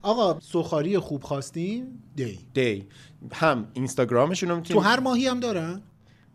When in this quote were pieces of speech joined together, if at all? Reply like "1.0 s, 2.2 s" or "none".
2.1 s